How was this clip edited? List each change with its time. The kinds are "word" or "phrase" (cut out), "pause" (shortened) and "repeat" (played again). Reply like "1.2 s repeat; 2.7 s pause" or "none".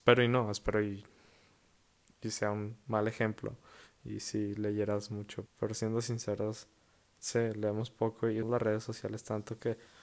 5.5 s word; 8.4 s word